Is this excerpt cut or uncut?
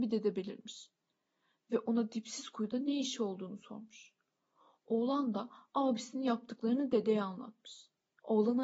uncut